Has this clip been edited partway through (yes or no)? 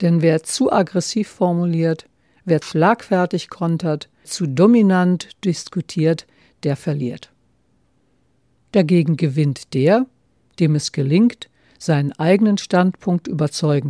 yes